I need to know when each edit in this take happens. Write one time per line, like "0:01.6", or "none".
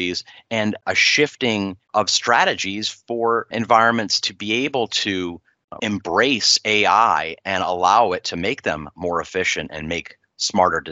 0:05.8